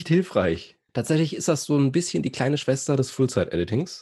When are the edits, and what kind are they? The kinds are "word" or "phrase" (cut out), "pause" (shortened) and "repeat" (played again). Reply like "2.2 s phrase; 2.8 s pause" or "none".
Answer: none